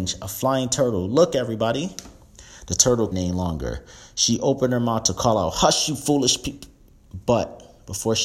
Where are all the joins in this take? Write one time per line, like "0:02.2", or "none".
0:03.1